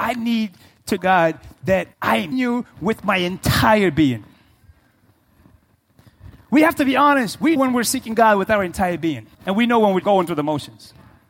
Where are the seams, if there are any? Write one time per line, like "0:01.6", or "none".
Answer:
0:01.0
0:01.9
0:02.3
0:07.6
0:09.3
0:10.0